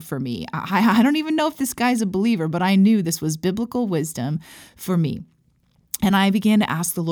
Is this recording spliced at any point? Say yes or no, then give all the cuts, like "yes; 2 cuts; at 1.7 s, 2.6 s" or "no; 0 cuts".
no; 0 cuts